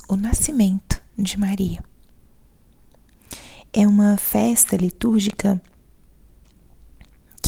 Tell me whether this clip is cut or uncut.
uncut